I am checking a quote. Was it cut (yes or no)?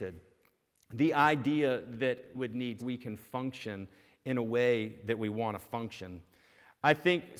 yes